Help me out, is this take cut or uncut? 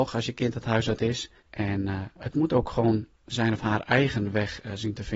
cut